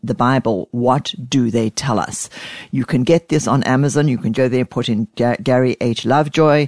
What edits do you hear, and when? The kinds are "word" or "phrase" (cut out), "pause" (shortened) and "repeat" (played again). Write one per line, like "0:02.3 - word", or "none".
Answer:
0:04.3 - word